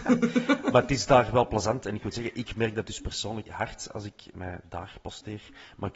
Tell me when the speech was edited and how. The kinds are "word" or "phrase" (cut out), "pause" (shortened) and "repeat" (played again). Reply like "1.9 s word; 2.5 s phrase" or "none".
3.4 s word; 4.3 s word